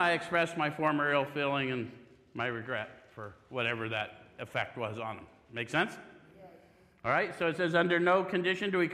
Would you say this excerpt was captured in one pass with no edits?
yes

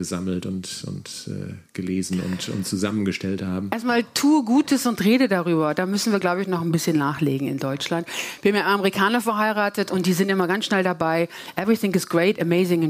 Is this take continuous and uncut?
yes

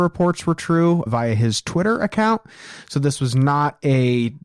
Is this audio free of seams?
no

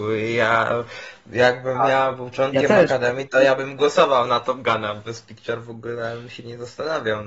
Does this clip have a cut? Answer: no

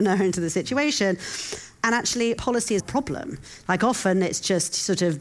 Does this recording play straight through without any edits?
no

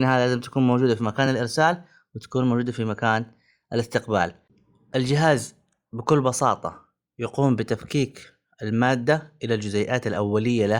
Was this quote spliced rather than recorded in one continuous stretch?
no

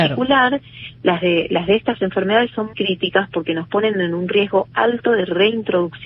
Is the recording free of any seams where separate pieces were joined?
no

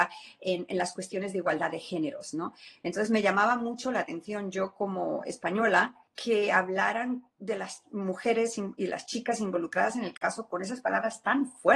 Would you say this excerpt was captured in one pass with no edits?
no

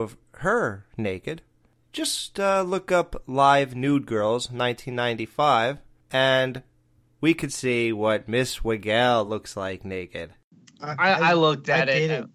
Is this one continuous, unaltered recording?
yes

